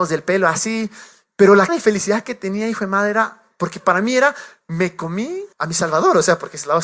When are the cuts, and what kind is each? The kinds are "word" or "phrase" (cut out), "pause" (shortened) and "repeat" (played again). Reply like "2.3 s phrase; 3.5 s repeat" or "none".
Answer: 1.7 s word; 5.5 s pause